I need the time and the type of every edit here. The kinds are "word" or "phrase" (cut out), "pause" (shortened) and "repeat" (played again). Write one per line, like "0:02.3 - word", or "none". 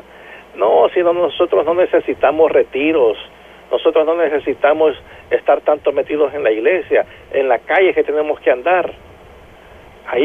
none